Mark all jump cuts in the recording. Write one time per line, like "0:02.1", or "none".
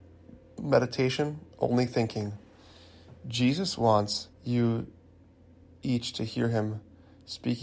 0:01.5
0:04.3